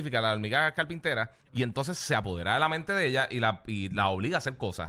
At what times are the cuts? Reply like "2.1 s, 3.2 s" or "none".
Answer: 1.4 s

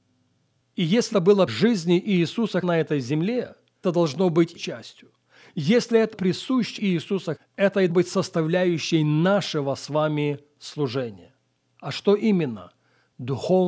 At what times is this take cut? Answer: 1.1 s, 1.5 s, 2.6 s, 3.8 s, 4.6 s, 6.1 s, 6.8 s, 7.4 s, 7.9 s

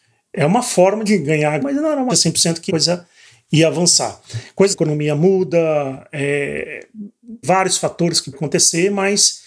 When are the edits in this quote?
1.1 s, 1.6 s, 2.1 s, 2.7 s, 4.7 s, 7.4 s, 8.3 s

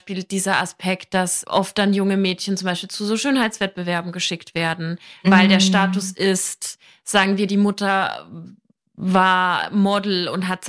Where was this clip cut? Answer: none

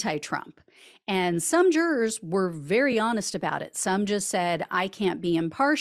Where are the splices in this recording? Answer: none

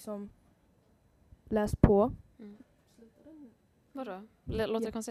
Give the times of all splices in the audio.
none

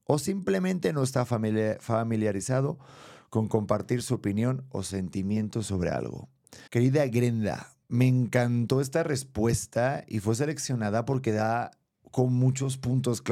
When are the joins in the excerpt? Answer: 6.7 s, 7.8 s

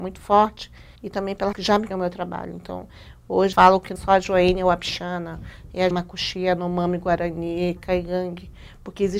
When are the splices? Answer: 1.0 s, 1.5 s, 1.9 s, 3.5 s, 4.0 s, 5.9 s, 7.8 s

